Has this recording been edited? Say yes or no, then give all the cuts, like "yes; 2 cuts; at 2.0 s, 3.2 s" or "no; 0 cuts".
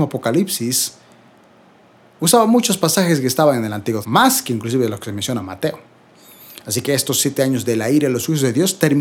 yes; 1 cut; at 4.0 s